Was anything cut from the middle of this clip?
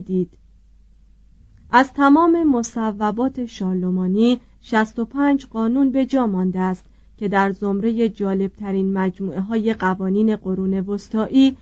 no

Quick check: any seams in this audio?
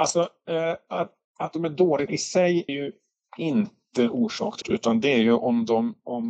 yes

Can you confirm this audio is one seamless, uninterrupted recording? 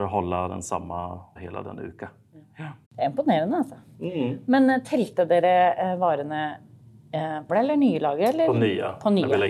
no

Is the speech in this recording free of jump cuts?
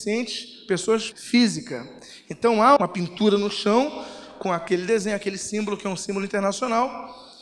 no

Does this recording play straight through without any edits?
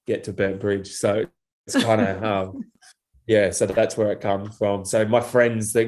yes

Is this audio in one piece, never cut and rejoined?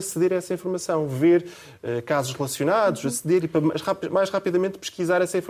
yes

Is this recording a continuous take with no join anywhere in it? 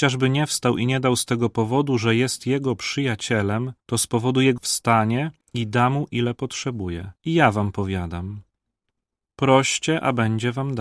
no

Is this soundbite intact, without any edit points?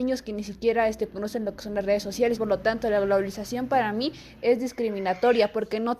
no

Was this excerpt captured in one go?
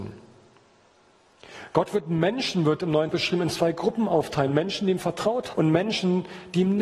no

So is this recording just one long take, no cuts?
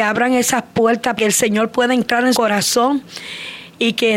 no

